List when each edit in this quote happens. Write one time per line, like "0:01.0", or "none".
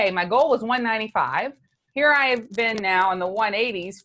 none